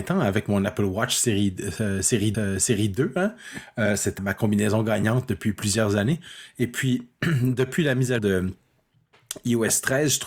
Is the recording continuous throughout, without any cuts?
no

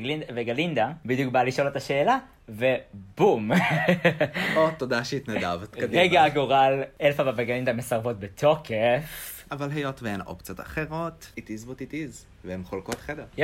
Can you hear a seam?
no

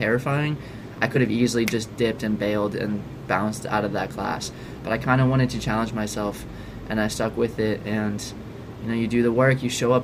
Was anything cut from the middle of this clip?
no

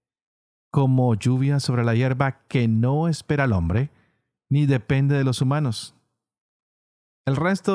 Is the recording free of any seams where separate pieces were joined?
yes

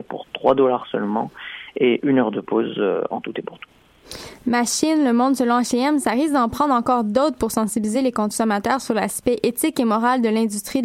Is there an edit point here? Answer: no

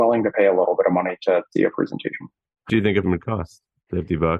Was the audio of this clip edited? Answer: yes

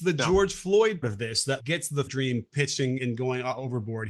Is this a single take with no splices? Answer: no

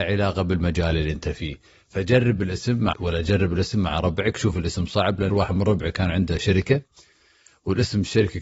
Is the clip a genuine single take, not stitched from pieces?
no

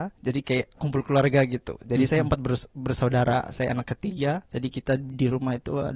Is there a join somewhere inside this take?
no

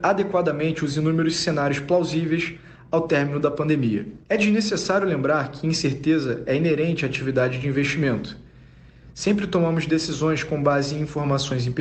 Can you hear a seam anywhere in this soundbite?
yes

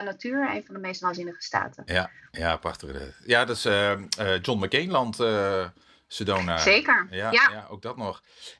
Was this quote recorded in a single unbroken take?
yes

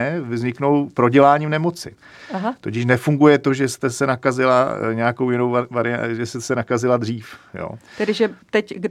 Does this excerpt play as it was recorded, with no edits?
yes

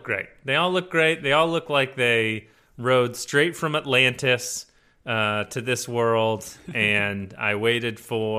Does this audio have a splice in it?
no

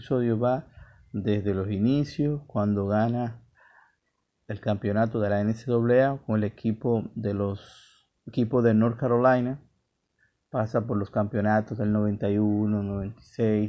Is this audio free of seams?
no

